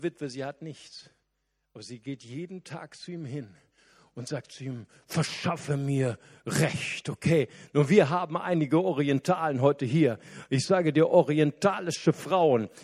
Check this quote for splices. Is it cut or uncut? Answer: uncut